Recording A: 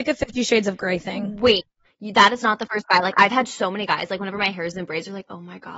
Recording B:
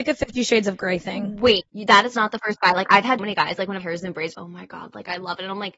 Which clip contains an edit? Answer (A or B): B